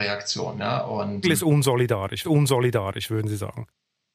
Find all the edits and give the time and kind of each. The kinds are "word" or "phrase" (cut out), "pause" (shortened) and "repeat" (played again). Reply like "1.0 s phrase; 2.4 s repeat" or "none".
1.2 s phrase; 2.2 s repeat